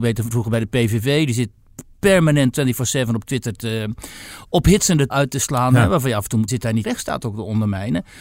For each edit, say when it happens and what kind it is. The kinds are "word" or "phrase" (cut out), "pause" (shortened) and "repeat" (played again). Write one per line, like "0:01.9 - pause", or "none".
0:05.1 - word
0:06.5 - word
0:06.8 - phrase